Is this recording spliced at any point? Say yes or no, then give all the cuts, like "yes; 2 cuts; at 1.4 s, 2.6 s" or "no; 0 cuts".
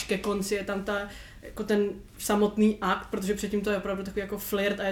no; 0 cuts